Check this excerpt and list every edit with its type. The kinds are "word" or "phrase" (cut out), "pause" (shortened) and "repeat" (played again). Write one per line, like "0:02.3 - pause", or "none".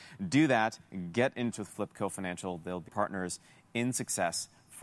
0:01.5 - word
0:02.9 - word